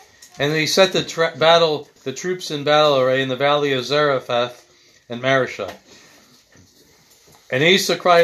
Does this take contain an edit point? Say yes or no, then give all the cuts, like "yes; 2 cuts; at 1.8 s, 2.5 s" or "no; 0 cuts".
yes; 1 cut; at 2.0 s